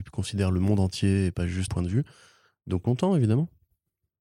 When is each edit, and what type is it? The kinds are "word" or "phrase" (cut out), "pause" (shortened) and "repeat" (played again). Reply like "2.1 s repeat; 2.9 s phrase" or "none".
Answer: 1.7 s word; 2.8 s word